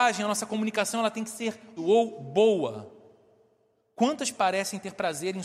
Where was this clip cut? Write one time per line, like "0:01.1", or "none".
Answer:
0:01.8
0:04.3